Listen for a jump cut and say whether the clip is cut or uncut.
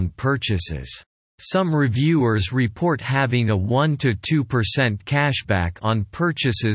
cut